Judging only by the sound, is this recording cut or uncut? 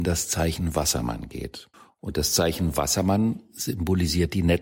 cut